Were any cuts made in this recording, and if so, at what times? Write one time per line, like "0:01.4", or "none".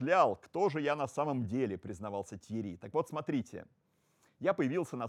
none